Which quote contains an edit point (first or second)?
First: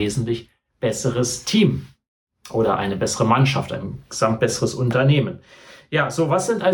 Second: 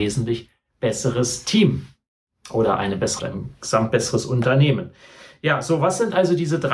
second